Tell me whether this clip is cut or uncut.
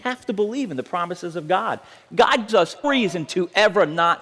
cut